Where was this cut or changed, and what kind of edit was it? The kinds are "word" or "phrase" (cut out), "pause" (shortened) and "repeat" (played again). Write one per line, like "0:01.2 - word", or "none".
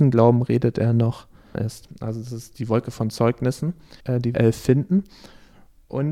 0:01.5 - phrase
0:04.0 - pause
0:04.3 - phrase